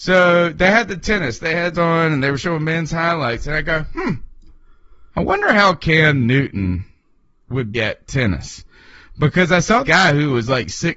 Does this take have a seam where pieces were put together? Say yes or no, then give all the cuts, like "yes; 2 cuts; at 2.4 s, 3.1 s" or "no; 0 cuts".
yes; 4 cuts; at 1.7 s, 5.1 s, 7.7 s, 9.8 s